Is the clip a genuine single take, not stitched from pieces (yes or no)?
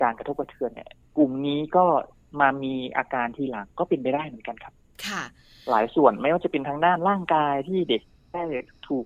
yes